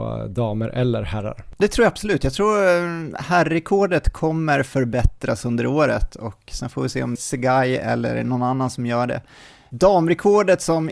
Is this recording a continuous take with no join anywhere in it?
no; 2 cuts; at 1.6 s, 7.2 s

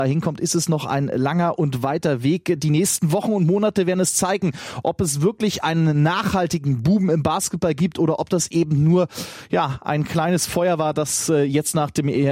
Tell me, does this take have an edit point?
no; 0 cuts

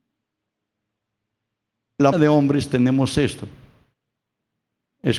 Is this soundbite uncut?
no; 1 cut; at 2.1 s

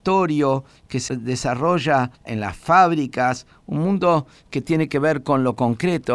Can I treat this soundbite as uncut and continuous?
no; 1 cut; at 2.1 s

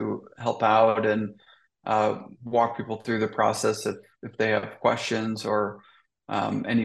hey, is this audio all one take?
yes; 0 cuts

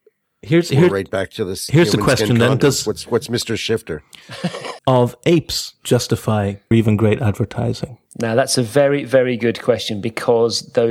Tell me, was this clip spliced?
yes; 3 cuts; at 4.8 s, 6.7 s, 8.1 s

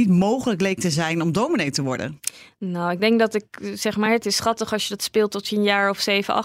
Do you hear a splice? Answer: no; 0 cuts

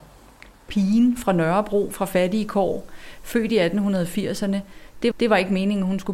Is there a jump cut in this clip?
yes; 1 cut; at 5.1 s

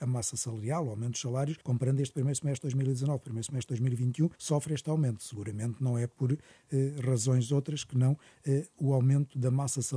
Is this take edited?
yes; 2 cuts; at 1.6 s, 4.3 s

